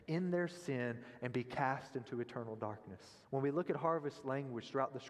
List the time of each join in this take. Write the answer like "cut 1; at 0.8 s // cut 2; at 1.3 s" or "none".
cut 1; at 3.2 s